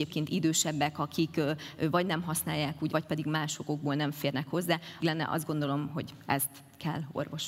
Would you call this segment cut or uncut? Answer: cut